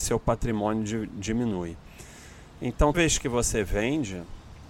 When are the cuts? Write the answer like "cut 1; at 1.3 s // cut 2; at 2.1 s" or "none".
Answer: cut 1; at 2.9 s